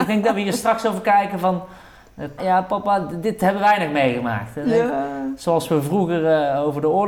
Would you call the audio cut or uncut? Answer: cut